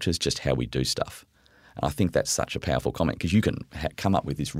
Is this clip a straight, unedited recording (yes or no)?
yes